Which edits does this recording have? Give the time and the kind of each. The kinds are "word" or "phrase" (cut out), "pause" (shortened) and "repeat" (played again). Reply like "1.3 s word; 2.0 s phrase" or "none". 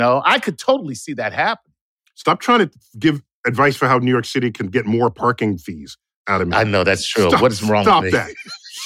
none